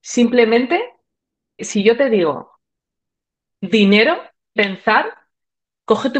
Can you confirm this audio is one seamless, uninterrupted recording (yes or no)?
no